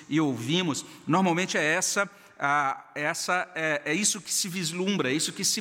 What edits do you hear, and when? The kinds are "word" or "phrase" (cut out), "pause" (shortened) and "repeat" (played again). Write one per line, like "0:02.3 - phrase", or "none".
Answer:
none